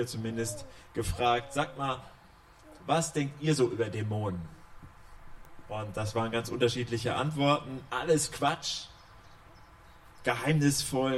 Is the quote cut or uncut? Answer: uncut